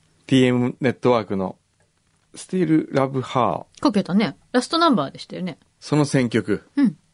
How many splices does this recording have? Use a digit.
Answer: 3